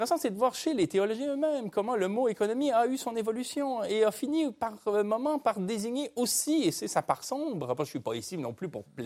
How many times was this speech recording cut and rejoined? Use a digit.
0